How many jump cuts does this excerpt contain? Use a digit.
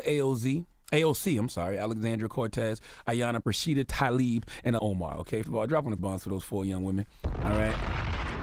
4